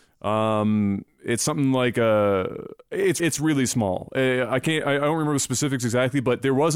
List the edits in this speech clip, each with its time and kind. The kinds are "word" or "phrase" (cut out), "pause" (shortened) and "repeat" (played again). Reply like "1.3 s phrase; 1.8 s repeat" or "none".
3.2 s word